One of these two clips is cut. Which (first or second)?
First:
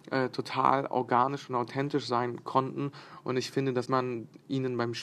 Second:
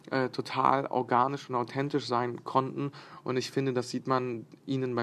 first